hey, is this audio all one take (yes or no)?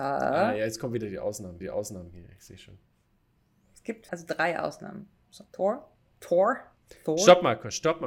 no